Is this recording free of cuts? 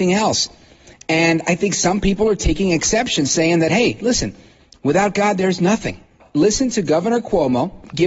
yes; 0 cuts

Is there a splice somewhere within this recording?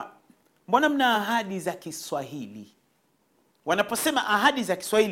no; 0 cuts

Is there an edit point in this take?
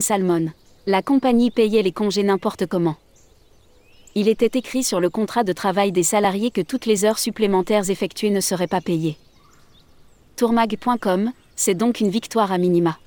no; 0 cuts

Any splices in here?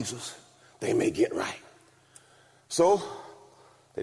no; 0 cuts

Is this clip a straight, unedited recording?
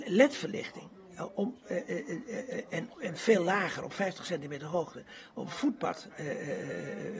no; 1 cut; at 2.9 s

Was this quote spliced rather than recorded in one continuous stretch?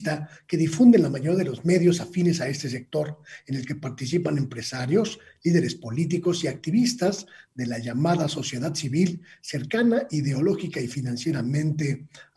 no; 0 cuts

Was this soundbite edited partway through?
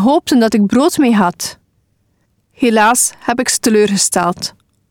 no; 0 cuts

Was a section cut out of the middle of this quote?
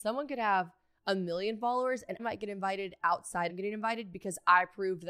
yes; 2 cuts; at 2.2 s, 3.5 s

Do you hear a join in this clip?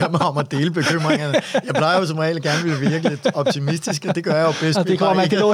no; 0 cuts

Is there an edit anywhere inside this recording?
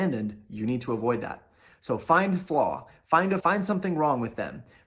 yes; 1 cut; at 3.4 s

